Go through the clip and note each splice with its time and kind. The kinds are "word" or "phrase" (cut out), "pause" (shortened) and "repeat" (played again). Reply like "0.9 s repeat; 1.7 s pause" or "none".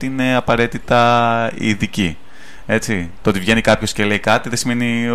none